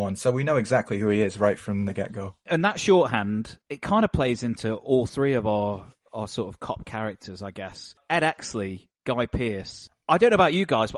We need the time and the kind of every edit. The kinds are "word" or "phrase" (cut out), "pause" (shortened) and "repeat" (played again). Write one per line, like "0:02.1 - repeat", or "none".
0:03.6 - pause